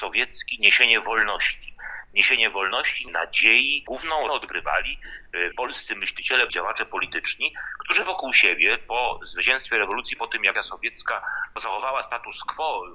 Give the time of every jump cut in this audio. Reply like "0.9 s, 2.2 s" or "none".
3.1 s, 4.3 s, 5.5 s, 6.5 s, 10.2 s, 10.5 s